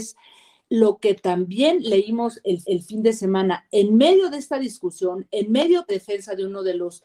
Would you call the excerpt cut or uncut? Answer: cut